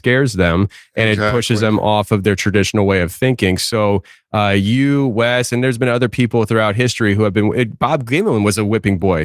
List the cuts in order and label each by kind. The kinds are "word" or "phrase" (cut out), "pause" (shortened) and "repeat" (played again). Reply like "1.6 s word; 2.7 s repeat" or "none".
none